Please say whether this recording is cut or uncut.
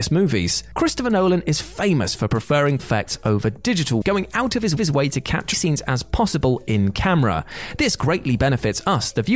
cut